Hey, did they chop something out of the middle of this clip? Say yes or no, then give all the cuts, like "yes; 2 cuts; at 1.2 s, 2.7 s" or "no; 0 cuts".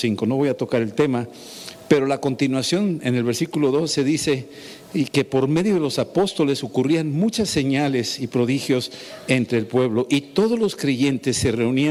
no; 0 cuts